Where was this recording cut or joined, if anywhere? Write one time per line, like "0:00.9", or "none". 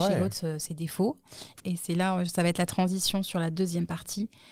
none